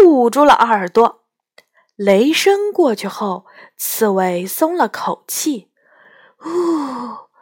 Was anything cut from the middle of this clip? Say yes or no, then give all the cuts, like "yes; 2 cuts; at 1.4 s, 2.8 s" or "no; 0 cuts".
no; 0 cuts